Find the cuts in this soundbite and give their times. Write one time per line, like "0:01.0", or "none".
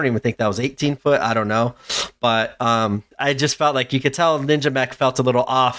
0:03.1